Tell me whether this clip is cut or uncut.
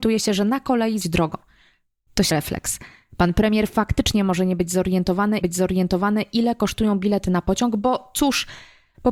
cut